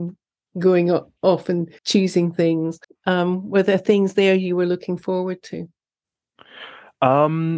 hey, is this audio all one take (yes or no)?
no